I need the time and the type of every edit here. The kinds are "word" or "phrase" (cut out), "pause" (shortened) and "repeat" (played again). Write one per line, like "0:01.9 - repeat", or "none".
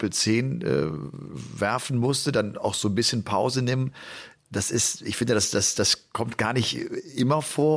none